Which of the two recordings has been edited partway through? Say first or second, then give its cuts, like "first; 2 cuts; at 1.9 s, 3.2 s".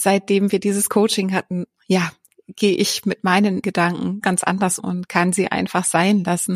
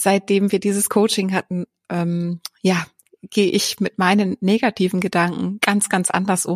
first; 4 cuts; at 1.8 s, 3.6 s, 4.2 s, 4.8 s